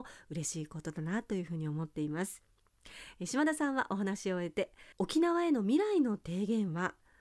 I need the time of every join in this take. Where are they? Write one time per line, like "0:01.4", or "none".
0:04.9